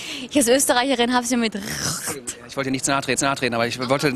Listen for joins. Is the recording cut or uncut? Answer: cut